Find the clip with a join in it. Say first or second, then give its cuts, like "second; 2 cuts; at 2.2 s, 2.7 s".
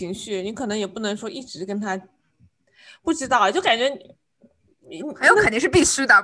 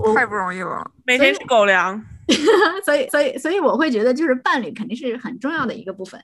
second; 1 cut; at 3.1 s